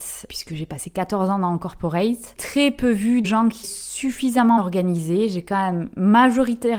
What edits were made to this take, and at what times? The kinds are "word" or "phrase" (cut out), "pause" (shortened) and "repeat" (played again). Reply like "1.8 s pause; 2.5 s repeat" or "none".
2.4 s word; 3.2 s word; 3.6 s word; 4.6 s word